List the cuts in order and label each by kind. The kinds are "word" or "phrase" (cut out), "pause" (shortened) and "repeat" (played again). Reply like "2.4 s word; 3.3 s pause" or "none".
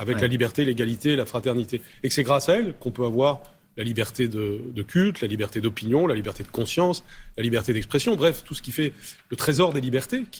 none